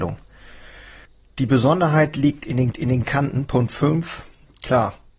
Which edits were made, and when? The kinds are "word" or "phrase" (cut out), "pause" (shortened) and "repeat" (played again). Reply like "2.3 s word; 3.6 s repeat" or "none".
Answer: 1.1 s pause; 2.7 s repeat